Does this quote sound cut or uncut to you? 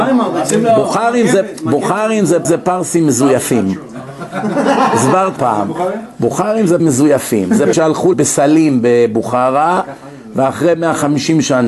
cut